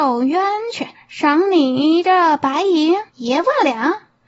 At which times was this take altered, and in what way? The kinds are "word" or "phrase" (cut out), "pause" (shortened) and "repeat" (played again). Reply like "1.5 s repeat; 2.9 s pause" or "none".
0.9 s pause; 3.1 s pause